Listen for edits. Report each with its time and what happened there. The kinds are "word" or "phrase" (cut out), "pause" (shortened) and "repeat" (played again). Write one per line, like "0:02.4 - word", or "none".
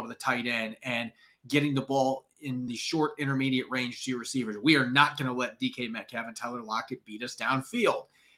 none

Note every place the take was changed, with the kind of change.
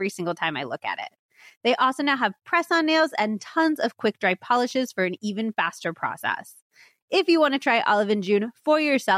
none

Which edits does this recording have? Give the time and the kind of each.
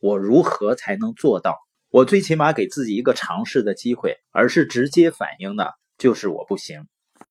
0:01.7 - pause
0:04.2 - pause

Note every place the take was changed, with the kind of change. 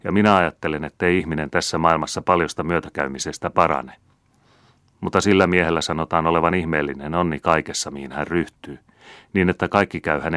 none

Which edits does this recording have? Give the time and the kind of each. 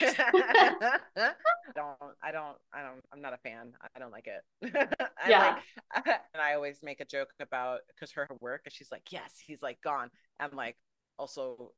0:01.8 - word
0:03.0 - pause
0:06.3 - phrase
0:08.3 - phrase

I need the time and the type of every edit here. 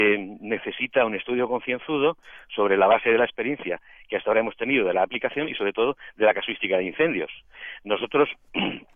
none

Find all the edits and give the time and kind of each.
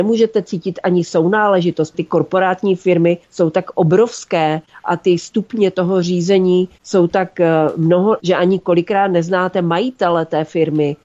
0:01.9 - word
0:03.2 - pause
0:08.2 - word

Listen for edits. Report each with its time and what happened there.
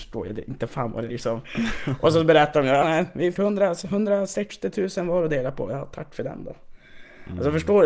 0:01.1 - word
0:02.8 - word
0:03.3 - word

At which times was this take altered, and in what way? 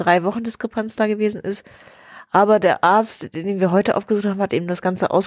none

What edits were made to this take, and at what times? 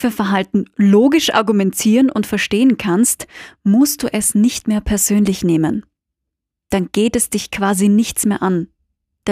none

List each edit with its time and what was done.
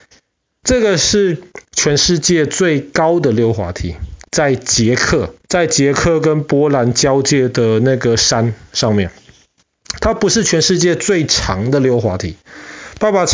0:04.2 - pause
0:05.4 - pause

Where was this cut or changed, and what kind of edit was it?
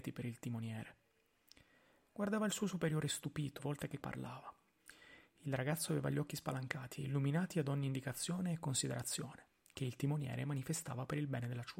0:03.6 - word
0:04.0 - word

